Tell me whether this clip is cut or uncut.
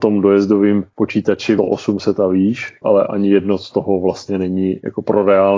cut